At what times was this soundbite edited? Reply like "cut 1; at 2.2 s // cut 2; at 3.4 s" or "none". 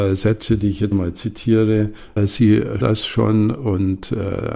cut 1; at 0.9 s // cut 2; at 2.2 s // cut 3; at 2.8 s

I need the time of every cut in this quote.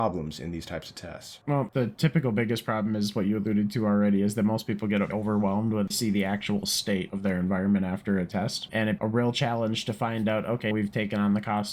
cut 1; at 5.1 s // cut 2; at 5.9 s // cut 3; at 9.0 s // cut 4; at 10.7 s

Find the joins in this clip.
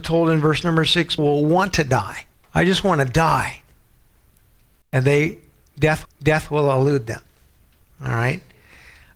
cut 1; at 1.2 s // cut 2; at 2.3 s // cut 3; at 6.0 s

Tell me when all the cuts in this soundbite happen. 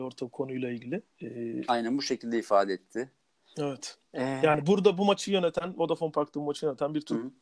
cut 1; at 1.1 s // cut 2; at 4.0 s

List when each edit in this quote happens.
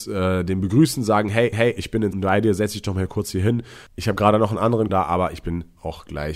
cut 1; at 1.5 s // cut 2; at 2.1 s // cut 3; at 4.9 s

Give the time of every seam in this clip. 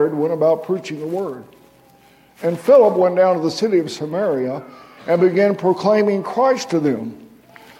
none

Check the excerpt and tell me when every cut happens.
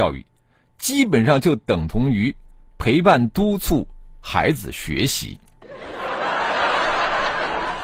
none

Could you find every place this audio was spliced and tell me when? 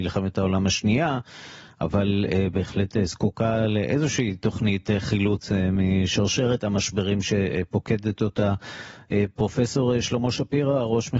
none

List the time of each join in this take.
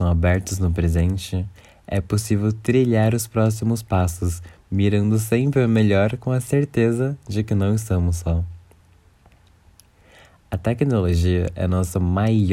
none

